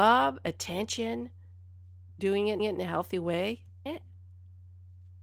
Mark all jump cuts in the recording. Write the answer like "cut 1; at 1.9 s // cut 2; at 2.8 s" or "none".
cut 1; at 2.2 s // cut 2; at 2.6 s // cut 3; at 3.9 s